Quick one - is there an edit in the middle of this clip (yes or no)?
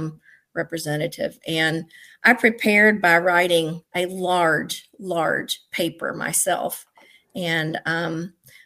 yes